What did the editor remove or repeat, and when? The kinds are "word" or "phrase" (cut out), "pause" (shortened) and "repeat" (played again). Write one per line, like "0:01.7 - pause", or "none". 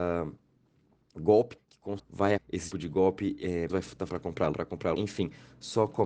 0:01.6 - word
0:02.0 - word
0:02.4 - word
0:02.7 - word
0:03.7 - word
0:04.1 - word
0:04.5 - word
0:04.9 - word